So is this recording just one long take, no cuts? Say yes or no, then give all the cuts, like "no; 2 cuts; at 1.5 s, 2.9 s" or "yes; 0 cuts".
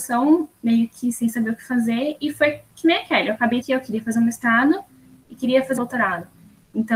no; 2 cuts; at 3.6 s, 5.8 s